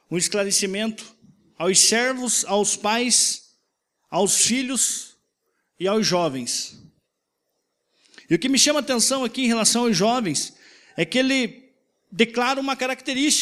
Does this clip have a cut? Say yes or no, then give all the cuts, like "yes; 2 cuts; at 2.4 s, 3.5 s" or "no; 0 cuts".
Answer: no; 0 cuts